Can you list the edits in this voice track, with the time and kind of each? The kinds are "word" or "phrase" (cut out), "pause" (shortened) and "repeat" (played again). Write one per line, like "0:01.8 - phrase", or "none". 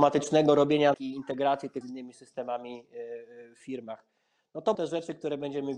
0:00.9 - word
0:01.8 - word
0:04.7 - word

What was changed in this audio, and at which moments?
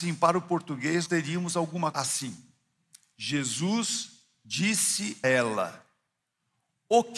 0:01.1 - word
0:01.9 - word
0:05.2 - word

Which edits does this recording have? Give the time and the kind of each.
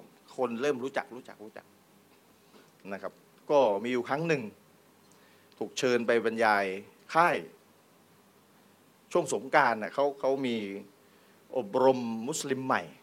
none

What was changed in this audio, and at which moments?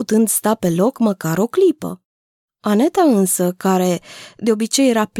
none

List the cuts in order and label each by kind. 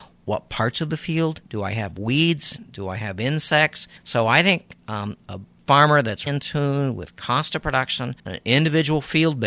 0:01.5 - pause
0:04.0 - pause
0:05.2 - pause
0:06.3 - word
0:08.2 - pause

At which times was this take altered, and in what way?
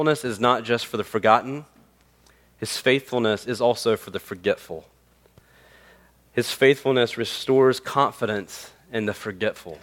none

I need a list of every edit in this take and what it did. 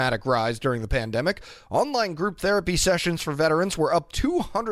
none

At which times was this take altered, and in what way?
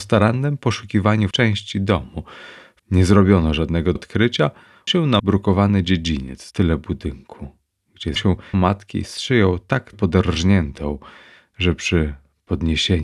0:01.3 - word
0:02.8 - word
0:04.0 - word
0:04.9 - word
0:05.2 - word
0:06.5 - word
0:08.2 - word
0:08.5 - word
0:09.9 - word

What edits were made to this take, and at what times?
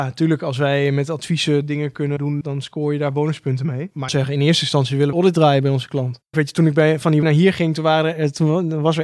0:02.4 - word
0:04.1 - phrase
0:05.1 - phrase
0:06.3 - phrase
0:07.2 - word

